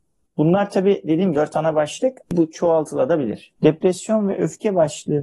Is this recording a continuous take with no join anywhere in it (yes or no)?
no